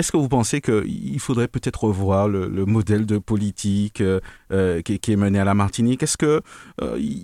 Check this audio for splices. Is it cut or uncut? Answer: uncut